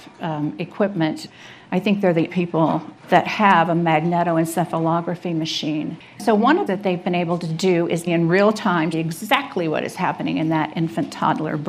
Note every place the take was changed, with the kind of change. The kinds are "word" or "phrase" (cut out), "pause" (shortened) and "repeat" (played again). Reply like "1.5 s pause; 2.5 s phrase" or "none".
2.3 s word; 3.0 s pause; 6.7 s phrase; 8.1 s word; 8.9 s word